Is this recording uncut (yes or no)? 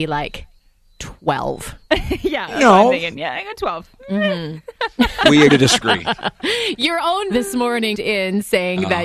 no